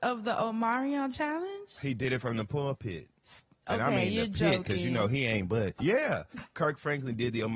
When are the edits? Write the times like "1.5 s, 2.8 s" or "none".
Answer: 5.8 s, 6.5 s